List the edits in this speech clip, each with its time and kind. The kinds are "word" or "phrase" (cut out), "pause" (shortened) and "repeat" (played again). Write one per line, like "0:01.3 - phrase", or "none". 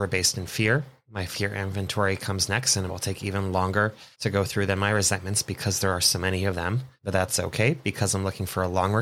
0:02.9 - phrase
0:04.1 - pause
0:07.0 - pause